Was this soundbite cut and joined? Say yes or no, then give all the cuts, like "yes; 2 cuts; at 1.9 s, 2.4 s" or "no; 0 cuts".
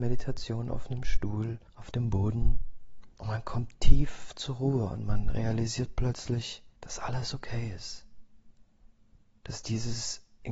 yes; 3 cuts; at 1.7 s, 3.1 s, 6.8 s